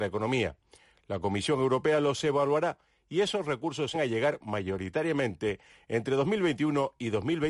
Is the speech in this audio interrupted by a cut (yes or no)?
yes